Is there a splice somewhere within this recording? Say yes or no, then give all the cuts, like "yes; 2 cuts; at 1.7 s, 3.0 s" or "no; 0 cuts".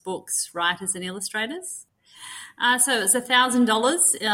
no; 0 cuts